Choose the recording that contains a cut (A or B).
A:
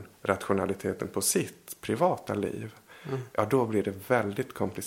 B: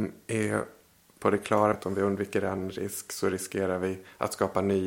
B